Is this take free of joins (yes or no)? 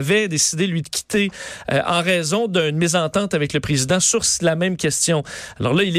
yes